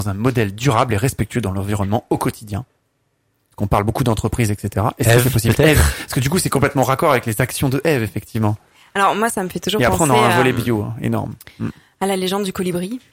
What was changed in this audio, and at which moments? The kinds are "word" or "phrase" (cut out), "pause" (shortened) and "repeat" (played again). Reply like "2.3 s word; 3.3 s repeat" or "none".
none